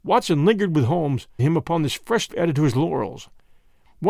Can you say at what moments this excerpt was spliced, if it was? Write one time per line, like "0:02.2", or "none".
0:01.4
0:02.3